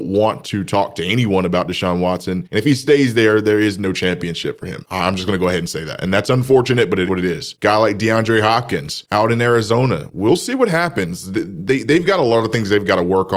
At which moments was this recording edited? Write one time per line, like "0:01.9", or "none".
0:07.1